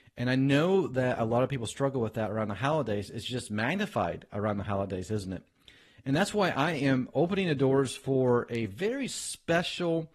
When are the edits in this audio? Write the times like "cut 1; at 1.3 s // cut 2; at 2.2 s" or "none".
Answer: none